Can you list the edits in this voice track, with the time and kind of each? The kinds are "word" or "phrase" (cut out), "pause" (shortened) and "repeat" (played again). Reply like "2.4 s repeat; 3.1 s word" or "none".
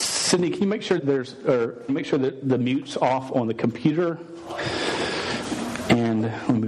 1.0 s word; 1.9 s word